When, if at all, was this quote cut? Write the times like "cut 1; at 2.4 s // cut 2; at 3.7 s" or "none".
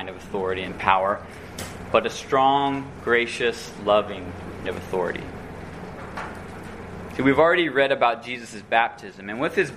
cut 1; at 4.6 s